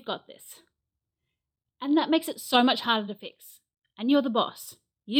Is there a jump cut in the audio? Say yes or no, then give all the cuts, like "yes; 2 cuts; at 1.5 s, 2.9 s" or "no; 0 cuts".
no; 0 cuts